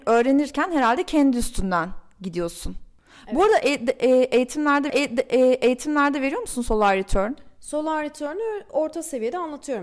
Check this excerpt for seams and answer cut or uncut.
cut